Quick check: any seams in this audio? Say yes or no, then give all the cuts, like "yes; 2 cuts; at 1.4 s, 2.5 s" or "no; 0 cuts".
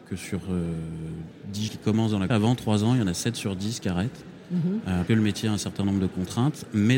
yes; 3 cuts; at 1.7 s, 2.3 s, 5.1 s